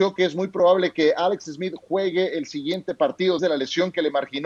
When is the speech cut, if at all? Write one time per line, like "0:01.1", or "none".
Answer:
0:03.4